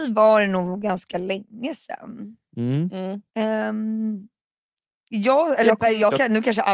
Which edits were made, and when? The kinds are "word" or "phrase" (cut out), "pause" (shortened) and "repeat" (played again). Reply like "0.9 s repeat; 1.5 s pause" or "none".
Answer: 2.4 s pause; 3.3 s pause